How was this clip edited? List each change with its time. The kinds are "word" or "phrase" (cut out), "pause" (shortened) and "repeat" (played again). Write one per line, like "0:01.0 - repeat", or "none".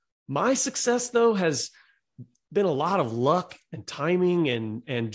none